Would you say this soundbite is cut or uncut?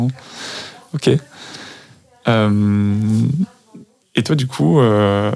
cut